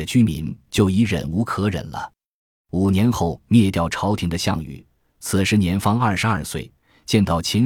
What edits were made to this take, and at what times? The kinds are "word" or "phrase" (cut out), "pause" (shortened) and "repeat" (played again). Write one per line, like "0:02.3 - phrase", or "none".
none